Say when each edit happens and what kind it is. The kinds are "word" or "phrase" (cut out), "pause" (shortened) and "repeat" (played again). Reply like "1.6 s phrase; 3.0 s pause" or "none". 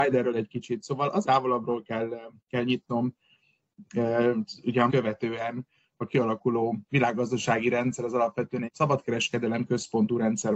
1.2 s phrase; 2.4 s pause; 4.9 s phrase; 6.8 s pause; 8.7 s word